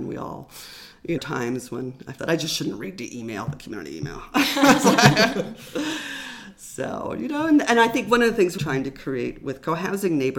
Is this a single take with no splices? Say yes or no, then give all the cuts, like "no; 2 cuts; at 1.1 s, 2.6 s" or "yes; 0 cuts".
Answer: no; 3 cuts; at 1.2 s, 2.2 s, 8.6 s